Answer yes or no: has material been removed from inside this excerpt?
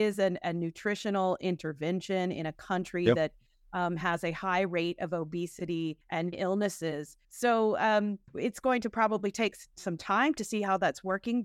yes